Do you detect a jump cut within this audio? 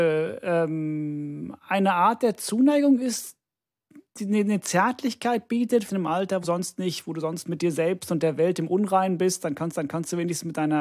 yes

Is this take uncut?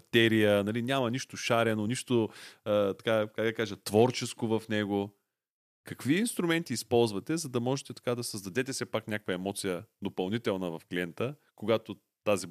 yes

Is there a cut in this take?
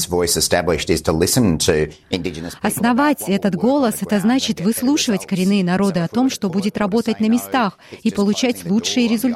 no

